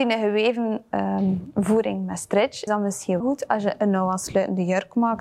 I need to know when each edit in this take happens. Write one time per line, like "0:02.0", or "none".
0:02.7
0:03.2